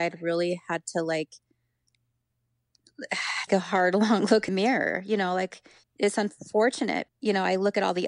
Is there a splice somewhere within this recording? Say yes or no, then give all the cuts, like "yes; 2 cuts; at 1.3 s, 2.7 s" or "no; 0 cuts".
yes; 4 cuts; at 3.5 s, 4.5 s, 5.8 s, 7.1 s